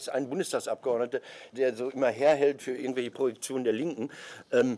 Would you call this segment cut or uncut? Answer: cut